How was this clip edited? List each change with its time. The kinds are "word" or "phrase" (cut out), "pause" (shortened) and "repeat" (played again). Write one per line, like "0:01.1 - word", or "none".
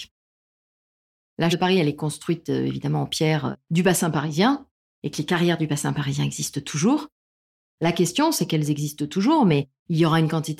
0:01.5 - phrase